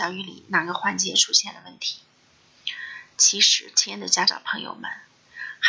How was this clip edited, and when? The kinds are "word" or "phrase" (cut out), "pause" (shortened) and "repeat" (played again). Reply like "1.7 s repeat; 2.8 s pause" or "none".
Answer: none